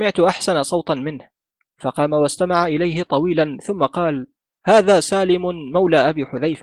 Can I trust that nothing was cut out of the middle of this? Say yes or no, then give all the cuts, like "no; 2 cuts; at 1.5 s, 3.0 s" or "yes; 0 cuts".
yes; 0 cuts